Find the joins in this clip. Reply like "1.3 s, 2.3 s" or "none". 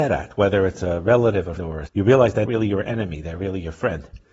1.6 s, 1.9 s, 2.5 s